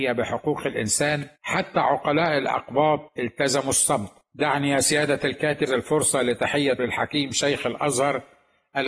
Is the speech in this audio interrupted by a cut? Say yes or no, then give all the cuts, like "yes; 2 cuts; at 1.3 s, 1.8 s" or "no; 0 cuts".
yes; 5 cuts; at 1.4 s, 3.1 s, 4.2 s, 5.7 s, 6.8 s